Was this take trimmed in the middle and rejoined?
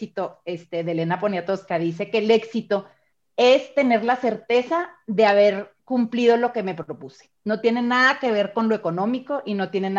yes; 3 cuts; at 3.1 s, 5.8 s, 7.4 s

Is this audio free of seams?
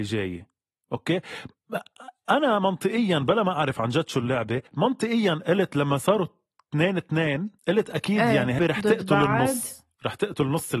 no; 3 cuts; at 4.7 s, 7.6 s, 8.6 s

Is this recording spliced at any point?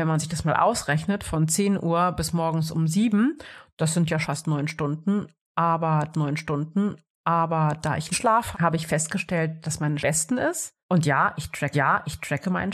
yes; 7 cuts; at 4.2 s, 6.1 s, 8.1 s, 8.5 s, 10.0 s, 10.8 s, 11.7 s

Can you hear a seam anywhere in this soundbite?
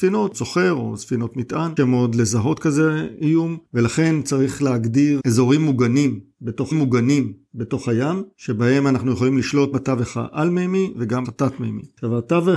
yes; 5 cuts; at 1.8 s, 5.2 s, 6.7 s, 9.7 s, 11.2 s

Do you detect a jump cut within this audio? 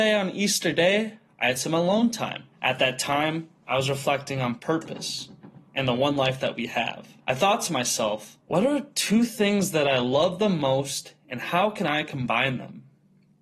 yes; 4 cuts; at 2.5 s, 5.7 s, 7.2 s, 8.4 s

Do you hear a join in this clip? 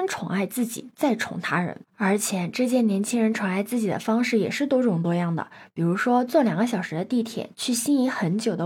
no; 0 cuts

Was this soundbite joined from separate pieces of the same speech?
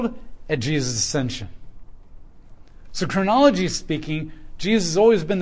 no; 0 cuts

